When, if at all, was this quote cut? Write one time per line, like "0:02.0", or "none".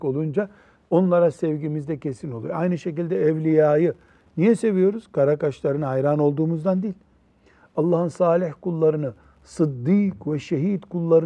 none